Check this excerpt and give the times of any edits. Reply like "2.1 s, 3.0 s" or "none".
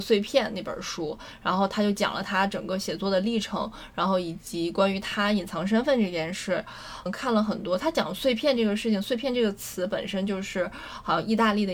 7.1 s